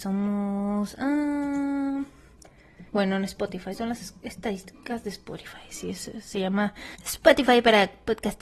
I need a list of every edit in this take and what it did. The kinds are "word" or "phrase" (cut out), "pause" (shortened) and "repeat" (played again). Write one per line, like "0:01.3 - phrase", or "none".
0:02.9 - pause
0:06.9 - pause